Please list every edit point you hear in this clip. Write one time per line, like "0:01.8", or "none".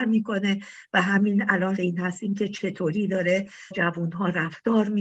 0:01.8
0:03.7